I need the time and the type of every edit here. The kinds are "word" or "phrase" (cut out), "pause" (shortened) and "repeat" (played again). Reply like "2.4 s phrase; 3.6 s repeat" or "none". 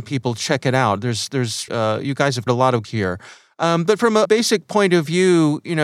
1.7 s word; 2.5 s word; 2.8 s word; 4.2 s word